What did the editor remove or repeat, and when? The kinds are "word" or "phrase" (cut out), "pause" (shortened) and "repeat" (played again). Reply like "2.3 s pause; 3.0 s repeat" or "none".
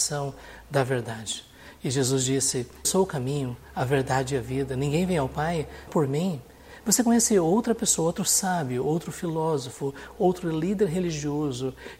2.8 s word; 5.9 s word